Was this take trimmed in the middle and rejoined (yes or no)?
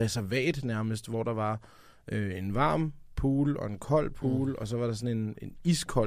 no